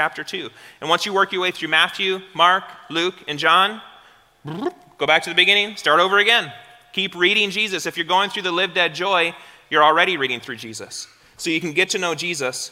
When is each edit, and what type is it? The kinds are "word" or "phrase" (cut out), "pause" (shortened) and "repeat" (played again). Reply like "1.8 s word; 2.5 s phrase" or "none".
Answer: none